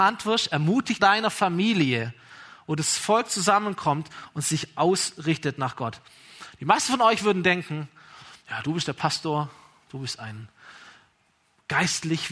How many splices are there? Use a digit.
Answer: 1